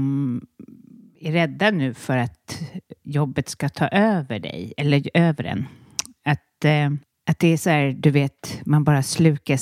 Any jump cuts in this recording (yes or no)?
no